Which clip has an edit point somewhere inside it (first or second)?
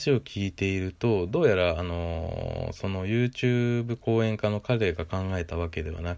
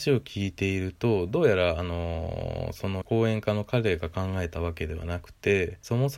second